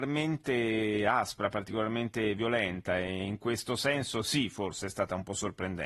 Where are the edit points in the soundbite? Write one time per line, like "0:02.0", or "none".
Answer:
none